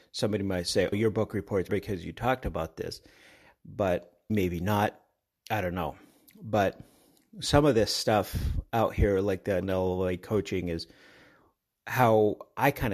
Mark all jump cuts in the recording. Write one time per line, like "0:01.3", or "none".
0:00.9
0:01.7
0:04.3
0:09.6